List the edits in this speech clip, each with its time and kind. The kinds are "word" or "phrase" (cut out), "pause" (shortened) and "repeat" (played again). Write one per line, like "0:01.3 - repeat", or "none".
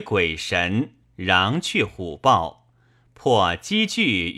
none